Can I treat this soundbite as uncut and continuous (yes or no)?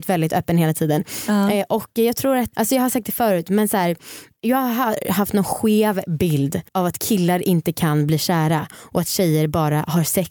no